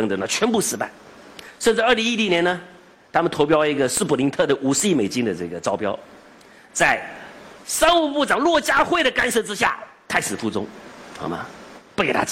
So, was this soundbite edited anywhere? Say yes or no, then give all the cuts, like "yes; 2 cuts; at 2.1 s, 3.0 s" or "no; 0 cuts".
no; 0 cuts